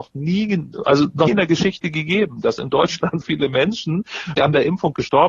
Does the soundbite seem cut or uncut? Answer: cut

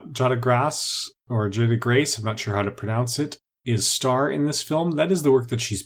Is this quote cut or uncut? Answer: uncut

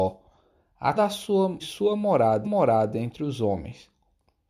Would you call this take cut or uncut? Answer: cut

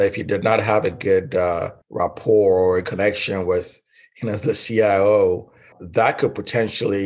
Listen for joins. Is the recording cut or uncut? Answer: cut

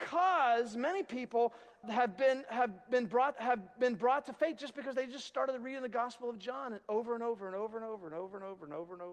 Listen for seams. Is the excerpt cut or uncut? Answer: cut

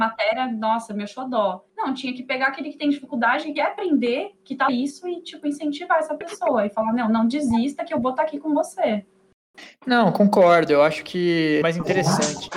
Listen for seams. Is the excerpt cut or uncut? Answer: cut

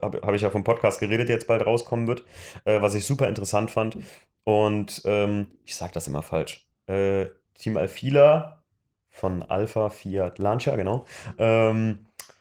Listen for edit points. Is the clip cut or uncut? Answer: cut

